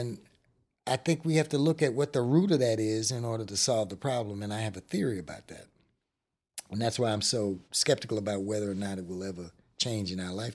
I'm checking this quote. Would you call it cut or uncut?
cut